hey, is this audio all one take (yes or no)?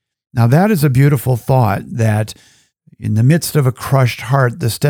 yes